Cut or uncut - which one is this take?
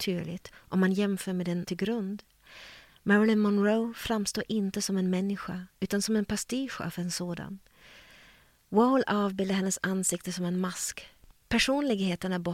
cut